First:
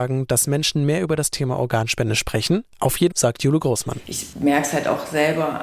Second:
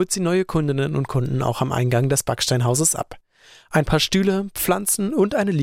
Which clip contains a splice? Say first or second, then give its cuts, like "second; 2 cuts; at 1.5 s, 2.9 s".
first; 1 cut; at 3.1 s